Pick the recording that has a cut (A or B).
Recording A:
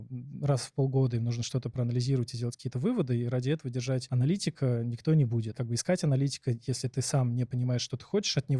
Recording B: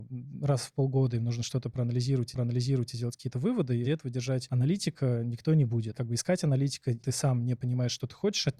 B